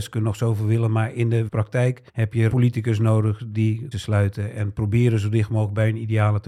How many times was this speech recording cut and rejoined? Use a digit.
4